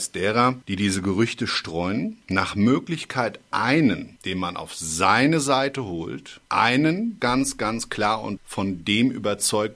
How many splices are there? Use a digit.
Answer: 3